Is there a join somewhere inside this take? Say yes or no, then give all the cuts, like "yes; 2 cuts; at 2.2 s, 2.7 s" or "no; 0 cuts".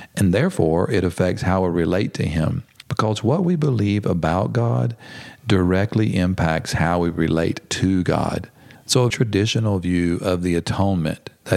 yes; 1 cut; at 9.1 s